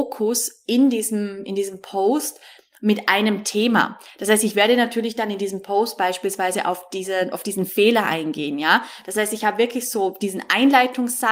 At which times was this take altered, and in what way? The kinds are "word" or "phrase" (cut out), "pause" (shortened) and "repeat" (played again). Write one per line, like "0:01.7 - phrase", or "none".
none